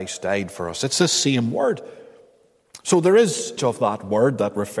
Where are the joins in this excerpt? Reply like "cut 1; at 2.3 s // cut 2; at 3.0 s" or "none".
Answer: cut 1; at 3.6 s